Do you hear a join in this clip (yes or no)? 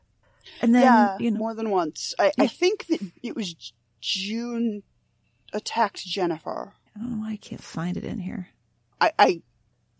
yes